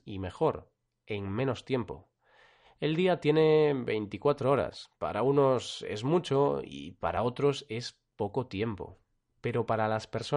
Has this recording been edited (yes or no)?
no